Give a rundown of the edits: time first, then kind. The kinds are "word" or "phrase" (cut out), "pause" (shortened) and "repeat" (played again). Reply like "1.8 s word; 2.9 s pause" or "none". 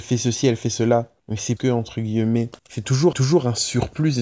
1.2 s pause; 1.6 s word; 2.6 s pause; 3.1 s repeat